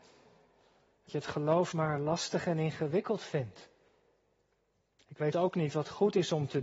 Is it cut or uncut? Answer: cut